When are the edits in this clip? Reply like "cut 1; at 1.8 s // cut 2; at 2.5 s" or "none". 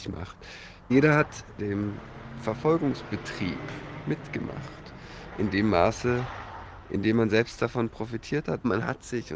cut 1; at 1.6 s